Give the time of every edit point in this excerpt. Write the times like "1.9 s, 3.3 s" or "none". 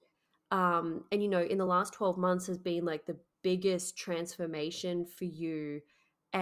none